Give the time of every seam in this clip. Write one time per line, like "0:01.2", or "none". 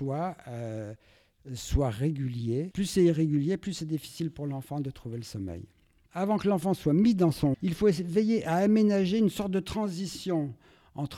0:07.5

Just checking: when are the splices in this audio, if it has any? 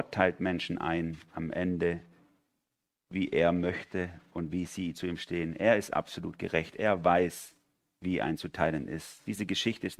none

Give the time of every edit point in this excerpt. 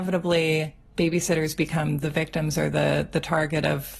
none

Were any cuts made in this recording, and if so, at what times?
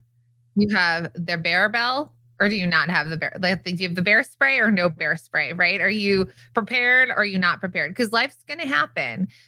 none

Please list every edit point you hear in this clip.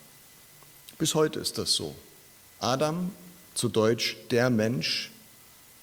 none

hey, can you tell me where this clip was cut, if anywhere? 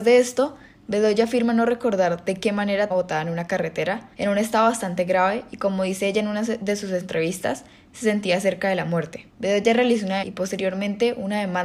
0:02.9
0:04.1
0:09.3
0:10.2

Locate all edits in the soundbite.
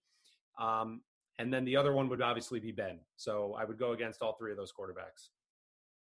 none

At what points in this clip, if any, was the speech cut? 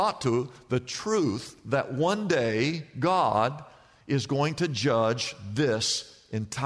none

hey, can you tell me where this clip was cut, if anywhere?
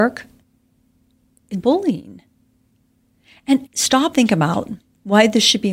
0:01.5
0:03.7
0:04.1

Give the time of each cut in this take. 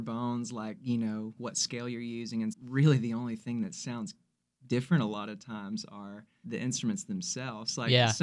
0:01.4
0:02.5
0:06.4

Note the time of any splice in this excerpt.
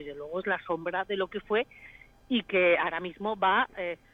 none

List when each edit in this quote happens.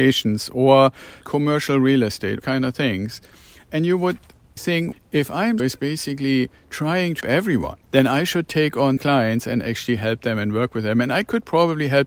0:01.2
0:02.4
0:04.6
0:04.9
0:05.6
0:07.2
0:07.8
0:09.0

